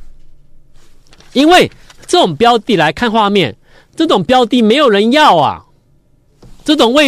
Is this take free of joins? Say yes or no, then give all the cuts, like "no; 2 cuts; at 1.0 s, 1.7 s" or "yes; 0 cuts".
yes; 0 cuts